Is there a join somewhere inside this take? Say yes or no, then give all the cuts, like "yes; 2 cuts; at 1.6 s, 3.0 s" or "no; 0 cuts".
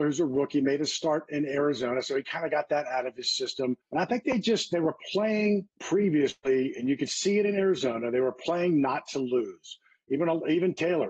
yes; 2 cuts; at 3.8 s, 5.7 s